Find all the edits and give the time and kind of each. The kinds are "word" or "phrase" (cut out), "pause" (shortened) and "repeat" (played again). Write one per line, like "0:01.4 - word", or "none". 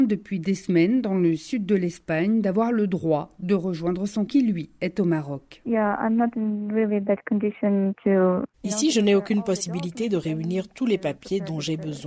0:04.3 - word